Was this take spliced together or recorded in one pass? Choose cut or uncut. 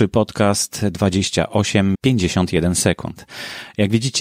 cut